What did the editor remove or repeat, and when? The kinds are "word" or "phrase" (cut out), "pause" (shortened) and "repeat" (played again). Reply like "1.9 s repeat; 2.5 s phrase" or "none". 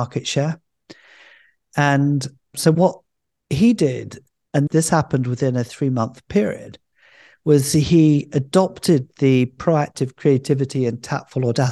none